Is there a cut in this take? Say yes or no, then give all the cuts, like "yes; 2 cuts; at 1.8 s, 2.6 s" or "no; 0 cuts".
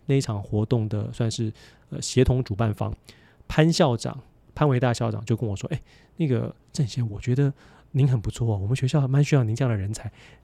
no; 0 cuts